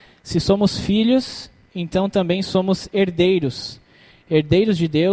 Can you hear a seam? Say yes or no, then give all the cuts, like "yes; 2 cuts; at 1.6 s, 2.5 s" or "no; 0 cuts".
no; 0 cuts